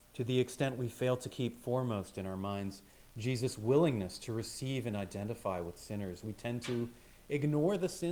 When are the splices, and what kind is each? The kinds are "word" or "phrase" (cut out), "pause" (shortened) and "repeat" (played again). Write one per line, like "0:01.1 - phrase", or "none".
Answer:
none